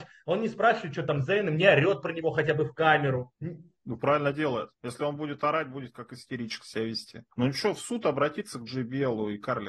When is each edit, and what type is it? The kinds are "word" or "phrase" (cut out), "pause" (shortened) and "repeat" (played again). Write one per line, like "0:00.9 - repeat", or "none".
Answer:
0:03.4 - pause
0:04.8 - pause
0:07.3 - pause

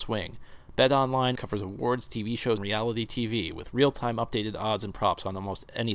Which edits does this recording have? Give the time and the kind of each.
0:01.3 - word
0:02.6 - word

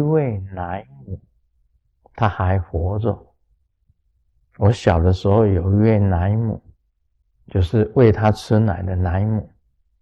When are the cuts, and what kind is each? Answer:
none

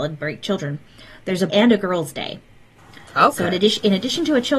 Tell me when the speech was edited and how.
0:01.5 - phrase

